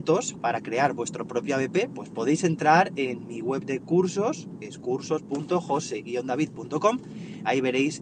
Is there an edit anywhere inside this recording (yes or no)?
no